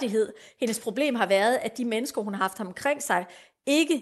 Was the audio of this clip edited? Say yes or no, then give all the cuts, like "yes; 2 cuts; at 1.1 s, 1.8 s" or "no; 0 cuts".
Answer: no; 0 cuts